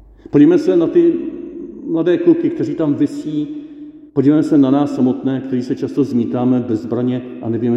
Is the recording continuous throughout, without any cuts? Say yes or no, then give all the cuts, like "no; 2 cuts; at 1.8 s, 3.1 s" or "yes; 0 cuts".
no; 1 cut; at 4.1 s